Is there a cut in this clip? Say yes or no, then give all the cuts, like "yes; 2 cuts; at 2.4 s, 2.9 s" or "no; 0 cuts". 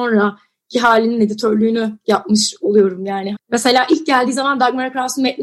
yes; 1 cut; at 3.3 s